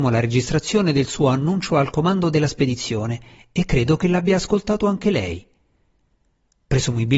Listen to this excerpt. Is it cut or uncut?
uncut